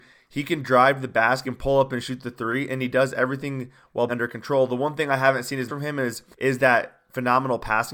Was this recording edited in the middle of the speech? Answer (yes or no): yes